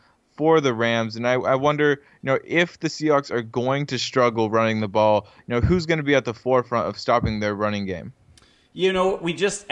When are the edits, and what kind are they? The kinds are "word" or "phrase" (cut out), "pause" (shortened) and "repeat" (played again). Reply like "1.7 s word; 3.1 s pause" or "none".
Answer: none